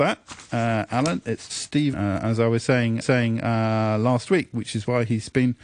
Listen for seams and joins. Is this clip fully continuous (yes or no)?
no